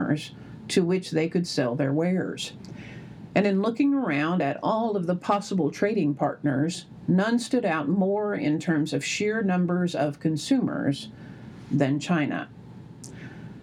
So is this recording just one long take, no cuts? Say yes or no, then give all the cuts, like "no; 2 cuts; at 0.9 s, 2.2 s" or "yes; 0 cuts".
yes; 0 cuts